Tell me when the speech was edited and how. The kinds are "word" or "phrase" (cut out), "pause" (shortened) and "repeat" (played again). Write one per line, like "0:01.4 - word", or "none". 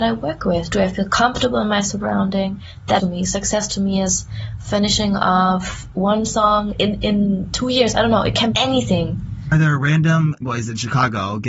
0:03.0 - phrase
0:06.7 - word
0:08.5 - word
0:10.4 - word